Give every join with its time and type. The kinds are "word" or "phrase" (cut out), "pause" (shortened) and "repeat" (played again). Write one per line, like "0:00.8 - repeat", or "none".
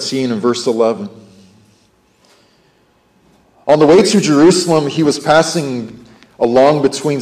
none